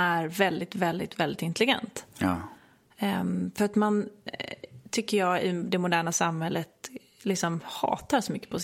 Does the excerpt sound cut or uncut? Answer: uncut